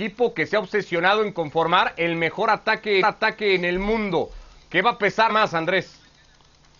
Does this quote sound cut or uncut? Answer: cut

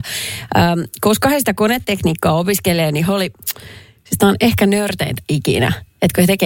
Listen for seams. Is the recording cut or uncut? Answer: uncut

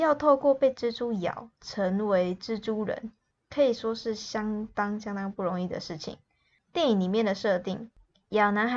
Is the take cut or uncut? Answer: uncut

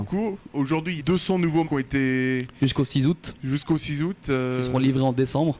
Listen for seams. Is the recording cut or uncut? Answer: cut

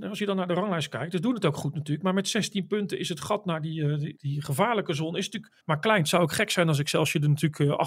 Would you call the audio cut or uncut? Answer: cut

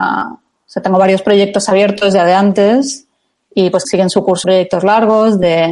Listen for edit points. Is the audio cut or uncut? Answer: cut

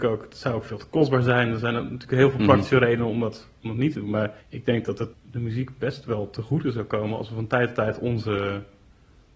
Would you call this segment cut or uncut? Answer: cut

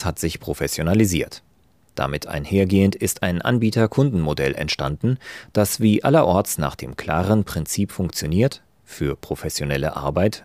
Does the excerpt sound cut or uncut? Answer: uncut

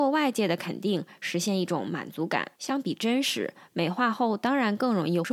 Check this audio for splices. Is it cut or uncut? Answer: cut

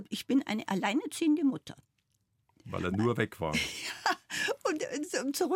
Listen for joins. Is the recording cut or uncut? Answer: uncut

